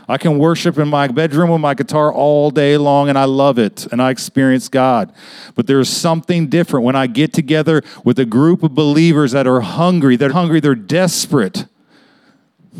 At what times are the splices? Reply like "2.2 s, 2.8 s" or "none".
10.3 s